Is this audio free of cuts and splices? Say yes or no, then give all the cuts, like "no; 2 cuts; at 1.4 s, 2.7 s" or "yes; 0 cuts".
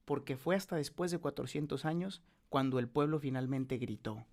yes; 0 cuts